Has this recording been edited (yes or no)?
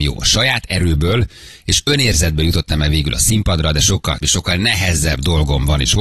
yes